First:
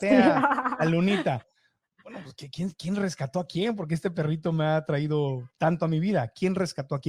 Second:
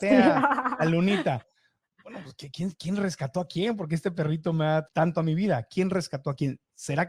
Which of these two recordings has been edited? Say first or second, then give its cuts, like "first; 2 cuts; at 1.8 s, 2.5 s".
second; 1 cut; at 4.9 s